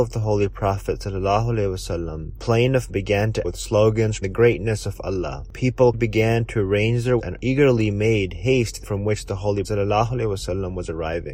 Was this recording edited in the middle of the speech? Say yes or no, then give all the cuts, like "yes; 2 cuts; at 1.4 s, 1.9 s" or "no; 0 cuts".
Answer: yes; 8 cuts; at 2.4 s, 2.9 s, 3.4 s, 4.2 s, 5.9 s, 7.2 s, 8.8 s, 9.6 s